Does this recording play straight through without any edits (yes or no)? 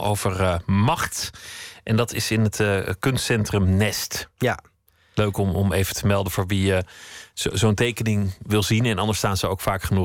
yes